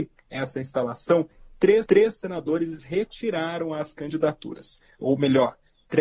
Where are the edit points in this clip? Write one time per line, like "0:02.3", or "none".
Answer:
0:01.9